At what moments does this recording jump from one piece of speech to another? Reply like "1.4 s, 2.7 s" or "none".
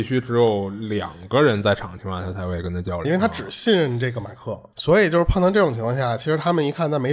3.0 s, 4.7 s